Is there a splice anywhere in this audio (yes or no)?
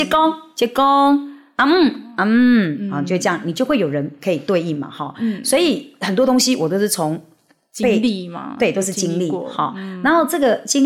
no